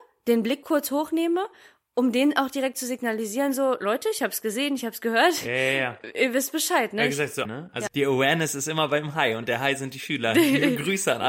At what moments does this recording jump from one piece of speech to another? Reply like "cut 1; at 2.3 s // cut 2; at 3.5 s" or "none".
cut 1; at 7.4 s // cut 2; at 7.9 s